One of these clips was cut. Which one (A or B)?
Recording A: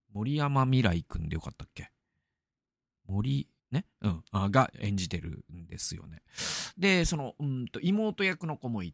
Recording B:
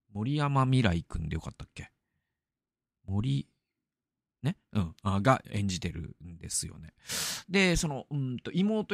A